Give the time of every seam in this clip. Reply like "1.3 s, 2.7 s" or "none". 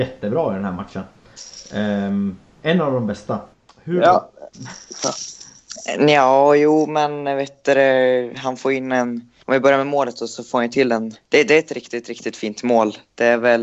3.5 s, 9.4 s, 11.2 s